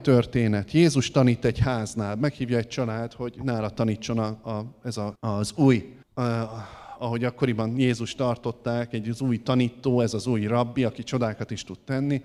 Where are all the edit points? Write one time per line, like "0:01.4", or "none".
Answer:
0:05.2
0:06.0